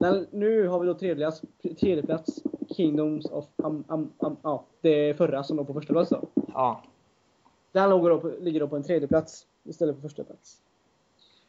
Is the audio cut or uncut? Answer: uncut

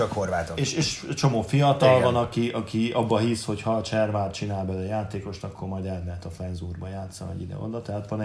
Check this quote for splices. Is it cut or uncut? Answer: uncut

